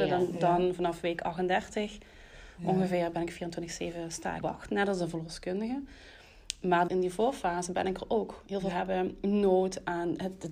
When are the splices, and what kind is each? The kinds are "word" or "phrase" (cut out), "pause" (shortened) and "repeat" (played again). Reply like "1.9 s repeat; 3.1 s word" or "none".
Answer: 4.4 s word; 6.9 s word; 8.7 s word

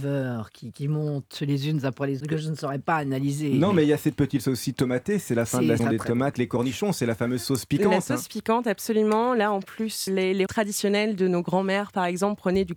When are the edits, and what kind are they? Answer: 2.2 s word; 4.4 s word; 5.8 s word; 6.3 s word; 10.1 s word; 10.5 s word

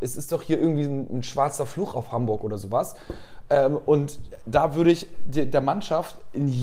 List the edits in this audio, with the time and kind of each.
none

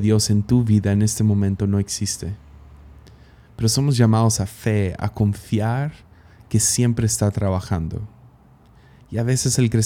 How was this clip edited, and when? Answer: none

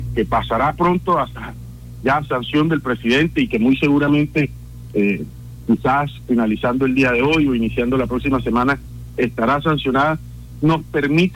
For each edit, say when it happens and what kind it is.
none

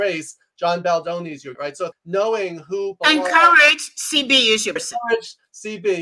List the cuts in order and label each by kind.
1.5 s word; 1.9 s word; 3.0 s word; 4.8 s word

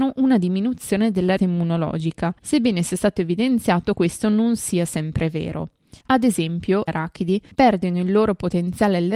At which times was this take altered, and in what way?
1.4 s word; 2.4 s pause; 4.0 s word; 6.0 s pause; 6.9 s word; 7.5 s pause

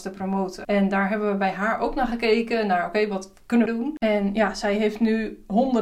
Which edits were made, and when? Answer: 3.7 s phrase

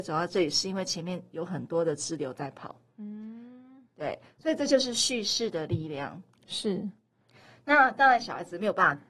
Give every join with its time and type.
none

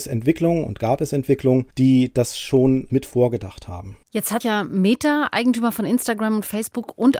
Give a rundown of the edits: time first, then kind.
1.7 s pause; 2.9 s word; 4.0 s pause; 4.4 s word

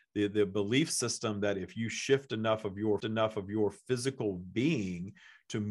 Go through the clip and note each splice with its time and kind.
3.0 s repeat

